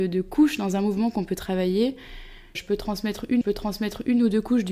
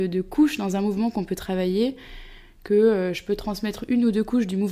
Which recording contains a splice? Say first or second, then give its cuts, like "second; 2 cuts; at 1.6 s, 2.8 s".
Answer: first; 2 cuts; at 2.5 s, 3.4 s